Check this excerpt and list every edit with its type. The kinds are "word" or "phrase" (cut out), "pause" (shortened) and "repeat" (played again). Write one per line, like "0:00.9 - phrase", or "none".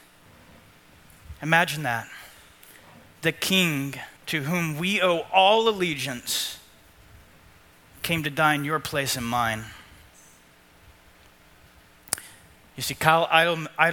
0:04.2 - pause

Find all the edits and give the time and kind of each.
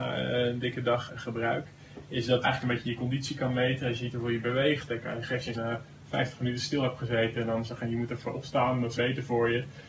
0:01.1 - word
0:02.4 - phrase
0:05.5 - phrase
0:09.0 - word

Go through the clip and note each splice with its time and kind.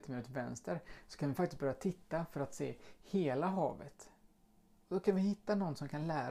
none

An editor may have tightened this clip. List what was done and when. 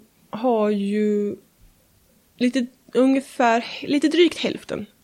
none

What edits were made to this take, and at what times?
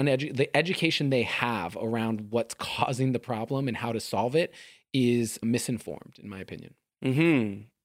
0:05.4 - word

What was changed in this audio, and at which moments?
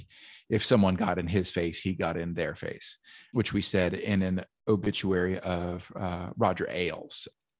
none

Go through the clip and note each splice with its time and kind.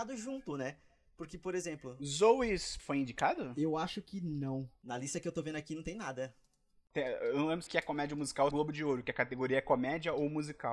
0:02.8 - word
0:07.7 - phrase
0:08.5 - phrase

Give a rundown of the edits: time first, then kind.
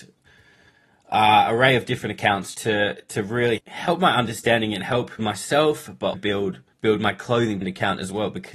0:02.5 - word
0:03.6 - word
0:05.2 - phrase
0:06.1 - word
0:06.7 - pause
0:07.6 - word

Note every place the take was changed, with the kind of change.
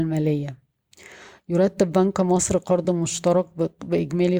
none

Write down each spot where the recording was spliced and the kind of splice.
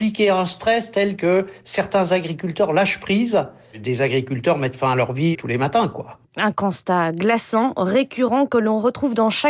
0:05.3 - word

